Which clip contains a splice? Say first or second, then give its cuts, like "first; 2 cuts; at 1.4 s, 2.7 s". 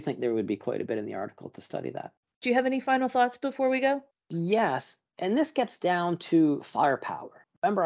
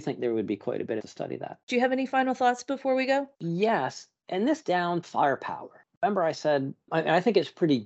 second; 5 cuts; at 1.0 s, 1.6 s, 3.3 s, 4.6 s, 5.0 s